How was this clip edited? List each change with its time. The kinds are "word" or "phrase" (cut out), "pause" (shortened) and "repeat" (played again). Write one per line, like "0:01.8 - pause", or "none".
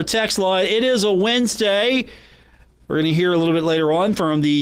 none